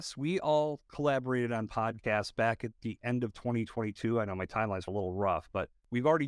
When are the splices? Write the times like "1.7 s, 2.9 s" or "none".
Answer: 4.9 s